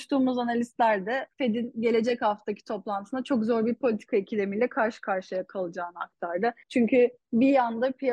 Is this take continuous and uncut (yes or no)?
no